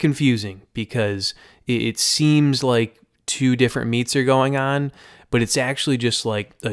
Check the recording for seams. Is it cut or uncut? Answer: uncut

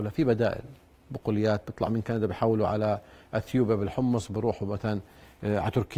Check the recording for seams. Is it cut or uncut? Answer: uncut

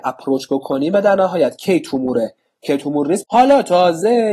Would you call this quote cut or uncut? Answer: cut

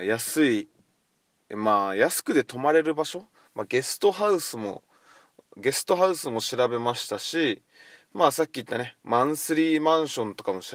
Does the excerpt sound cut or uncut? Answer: uncut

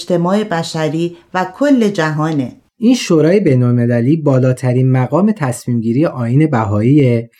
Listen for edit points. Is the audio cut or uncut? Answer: cut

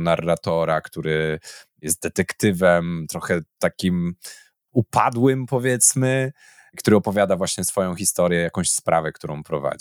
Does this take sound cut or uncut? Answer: uncut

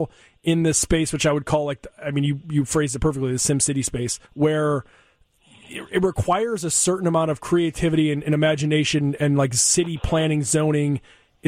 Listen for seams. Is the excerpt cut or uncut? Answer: cut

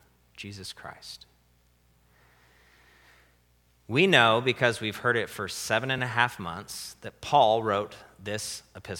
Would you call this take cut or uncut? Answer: uncut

